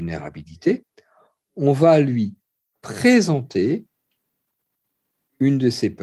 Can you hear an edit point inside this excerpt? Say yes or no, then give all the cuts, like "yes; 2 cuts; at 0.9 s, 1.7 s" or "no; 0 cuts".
no; 0 cuts